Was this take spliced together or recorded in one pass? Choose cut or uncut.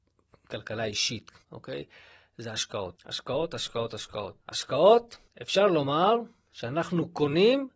cut